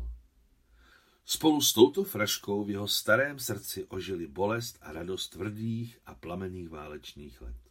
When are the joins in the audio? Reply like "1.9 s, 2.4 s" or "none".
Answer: none